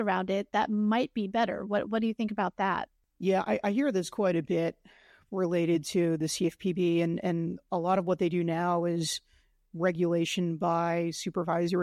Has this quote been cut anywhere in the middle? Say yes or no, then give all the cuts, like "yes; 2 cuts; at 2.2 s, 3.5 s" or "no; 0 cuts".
no; 0 cuts